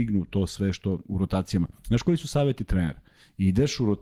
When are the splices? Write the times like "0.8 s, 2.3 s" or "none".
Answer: 1.8 s